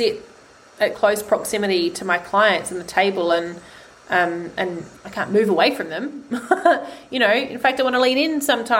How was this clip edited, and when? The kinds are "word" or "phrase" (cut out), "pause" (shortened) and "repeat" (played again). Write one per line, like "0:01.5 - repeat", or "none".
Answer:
0:00.9 - word
0:05.0 - word